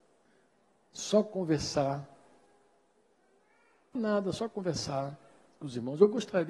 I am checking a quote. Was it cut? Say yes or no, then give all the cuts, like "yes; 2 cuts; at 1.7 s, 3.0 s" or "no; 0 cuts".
yes; 1 cut; at 4.0 s